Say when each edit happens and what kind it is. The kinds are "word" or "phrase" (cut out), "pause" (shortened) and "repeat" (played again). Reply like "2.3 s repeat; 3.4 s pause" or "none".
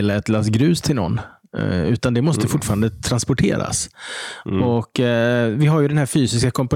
none